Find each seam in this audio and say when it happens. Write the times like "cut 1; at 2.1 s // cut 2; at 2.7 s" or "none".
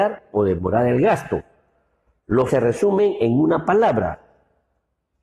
cut 1; at 2.5 s